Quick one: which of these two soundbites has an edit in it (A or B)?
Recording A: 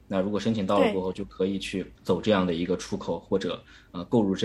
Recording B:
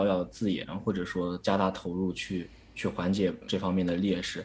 A